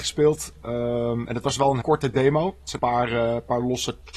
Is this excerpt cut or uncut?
cut